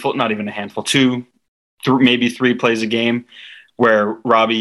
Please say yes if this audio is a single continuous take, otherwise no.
yes